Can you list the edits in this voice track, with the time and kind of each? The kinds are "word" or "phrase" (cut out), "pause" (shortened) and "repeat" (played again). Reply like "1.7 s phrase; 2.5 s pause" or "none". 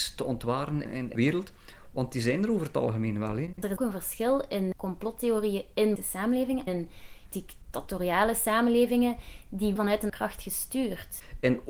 1.2 s word; 3.8 s word; 4.7 s word; 6.0 s word; 6.7 s word; 7.3 s word; 9.8 s word; 10.1 s word